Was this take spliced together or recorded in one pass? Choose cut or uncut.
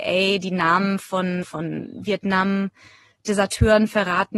cut